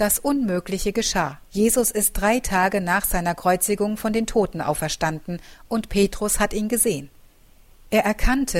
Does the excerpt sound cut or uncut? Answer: cut